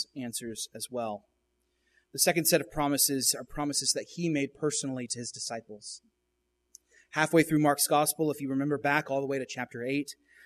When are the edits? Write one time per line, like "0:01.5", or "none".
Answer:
none